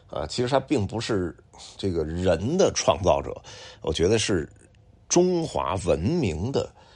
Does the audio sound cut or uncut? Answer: uncut